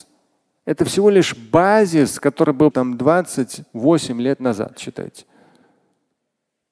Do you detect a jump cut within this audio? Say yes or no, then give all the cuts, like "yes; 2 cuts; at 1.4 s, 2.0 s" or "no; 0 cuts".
yes; 1 cut; at 2.7 s